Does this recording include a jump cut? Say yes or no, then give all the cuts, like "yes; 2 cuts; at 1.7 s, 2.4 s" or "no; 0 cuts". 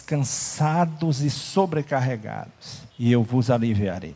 yes; 1 cut; at 2.9 s